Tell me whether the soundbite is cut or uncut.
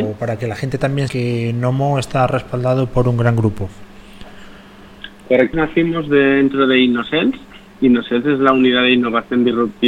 cut